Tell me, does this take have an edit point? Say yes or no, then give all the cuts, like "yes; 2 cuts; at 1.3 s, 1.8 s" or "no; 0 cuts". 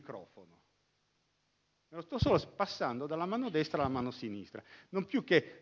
no; 0 cuts